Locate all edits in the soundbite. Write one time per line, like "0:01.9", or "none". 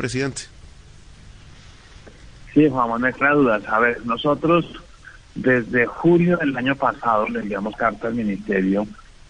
0:03.2
0:07.7